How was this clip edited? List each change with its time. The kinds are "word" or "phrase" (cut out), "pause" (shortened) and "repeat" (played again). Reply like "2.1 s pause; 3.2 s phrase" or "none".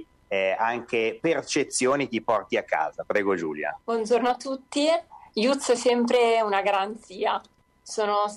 none